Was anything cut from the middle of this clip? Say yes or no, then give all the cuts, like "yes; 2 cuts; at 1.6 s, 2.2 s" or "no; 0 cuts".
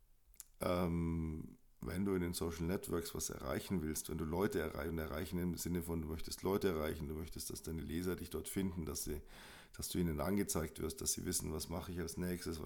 no; 0 cuts